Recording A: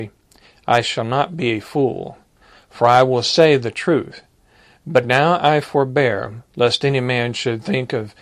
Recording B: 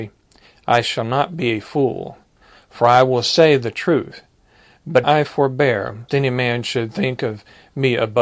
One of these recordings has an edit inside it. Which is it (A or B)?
B